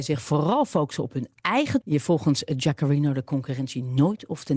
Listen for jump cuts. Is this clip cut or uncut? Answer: cut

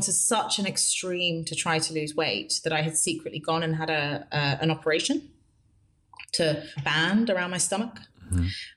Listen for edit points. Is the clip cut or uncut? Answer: cut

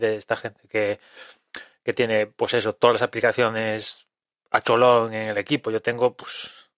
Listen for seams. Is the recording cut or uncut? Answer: uncut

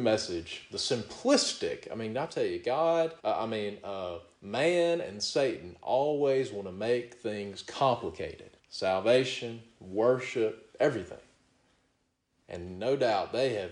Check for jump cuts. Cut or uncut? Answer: cut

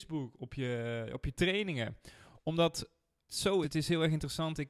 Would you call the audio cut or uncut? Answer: cut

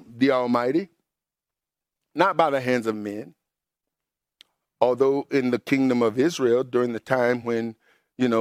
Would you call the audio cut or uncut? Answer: uncut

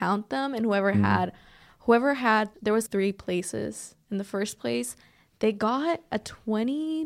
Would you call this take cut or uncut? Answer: cut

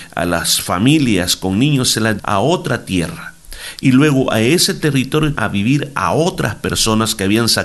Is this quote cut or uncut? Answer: cut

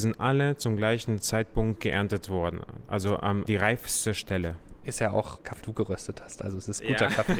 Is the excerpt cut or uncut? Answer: cut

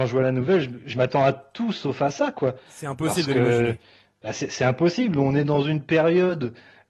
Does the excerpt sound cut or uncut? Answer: uncut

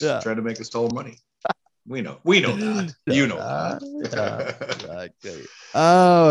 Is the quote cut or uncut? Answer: cut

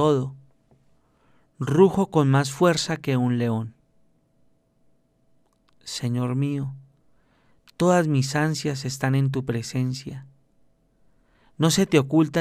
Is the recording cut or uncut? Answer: uncut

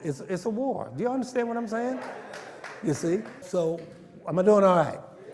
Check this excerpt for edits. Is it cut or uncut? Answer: cut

